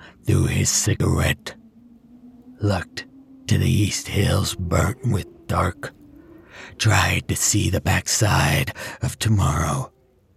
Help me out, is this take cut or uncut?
uncut